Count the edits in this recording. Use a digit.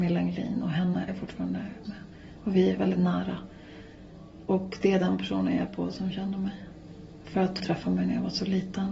5